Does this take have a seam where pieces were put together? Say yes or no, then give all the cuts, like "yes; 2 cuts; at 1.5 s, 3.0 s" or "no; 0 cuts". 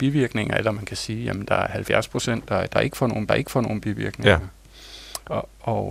yes; 1 cut; at 3.3 s